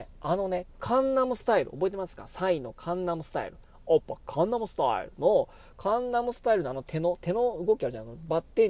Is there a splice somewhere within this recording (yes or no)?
no